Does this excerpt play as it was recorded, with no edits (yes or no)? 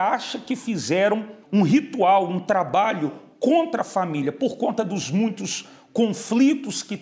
no